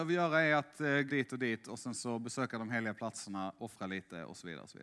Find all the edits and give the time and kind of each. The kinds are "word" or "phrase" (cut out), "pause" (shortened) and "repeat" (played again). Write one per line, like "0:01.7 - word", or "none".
0:01.1 - word